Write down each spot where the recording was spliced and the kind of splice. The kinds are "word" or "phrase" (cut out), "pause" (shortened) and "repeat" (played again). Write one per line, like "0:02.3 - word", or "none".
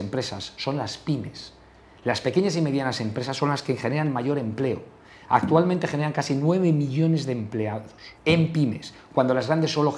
0:08.1 - pause